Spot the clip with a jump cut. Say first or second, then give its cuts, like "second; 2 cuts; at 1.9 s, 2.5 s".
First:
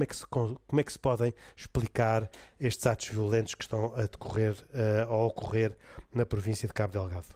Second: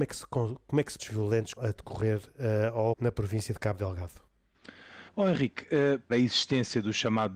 second; 5 cuts; at 1.0 s, 1.6 s, 2.9 s, 5.1 s, 6.1 s